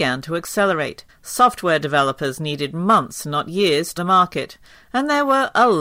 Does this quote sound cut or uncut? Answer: cut